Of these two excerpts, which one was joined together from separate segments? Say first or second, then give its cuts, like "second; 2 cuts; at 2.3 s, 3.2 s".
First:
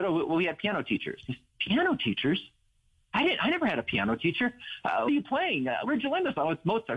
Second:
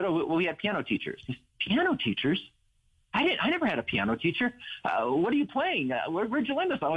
first; 2 cuts; at 5.1 s, 5.8 s